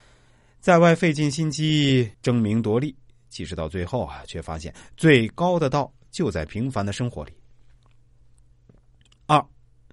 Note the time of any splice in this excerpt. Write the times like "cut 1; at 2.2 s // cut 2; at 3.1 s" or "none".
cut 1; at 2.1 s